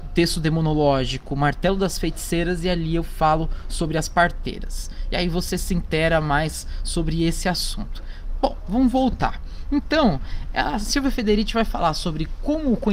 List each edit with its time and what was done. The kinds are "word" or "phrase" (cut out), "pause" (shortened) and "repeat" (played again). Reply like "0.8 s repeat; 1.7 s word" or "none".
none